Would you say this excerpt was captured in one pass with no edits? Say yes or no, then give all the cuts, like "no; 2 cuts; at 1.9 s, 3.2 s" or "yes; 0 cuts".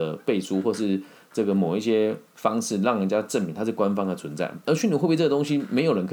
yes; 0 cuts